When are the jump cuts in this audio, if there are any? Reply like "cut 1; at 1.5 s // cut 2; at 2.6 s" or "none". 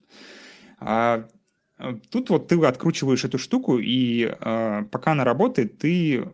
none